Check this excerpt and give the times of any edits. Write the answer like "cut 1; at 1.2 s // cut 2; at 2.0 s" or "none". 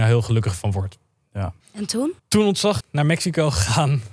cut 1; at 1.6 s // cut 2; at 2.2 s // cut 3; at 2.8 s